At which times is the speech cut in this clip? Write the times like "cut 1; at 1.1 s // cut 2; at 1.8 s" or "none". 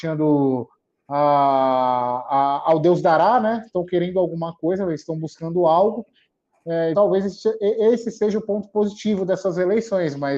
cut 1; at 6.9 s